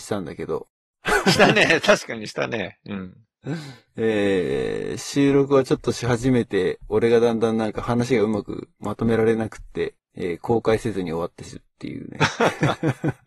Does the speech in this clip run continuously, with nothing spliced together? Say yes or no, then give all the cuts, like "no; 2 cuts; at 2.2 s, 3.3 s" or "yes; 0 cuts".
no; 1 cut; at 10.0 s